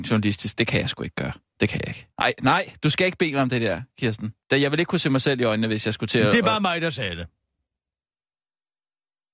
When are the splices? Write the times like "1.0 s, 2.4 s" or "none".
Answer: 2.1 s, 4.4 s